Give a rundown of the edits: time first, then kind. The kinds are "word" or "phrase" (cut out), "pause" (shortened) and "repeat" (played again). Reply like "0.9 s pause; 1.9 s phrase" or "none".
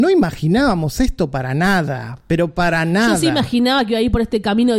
none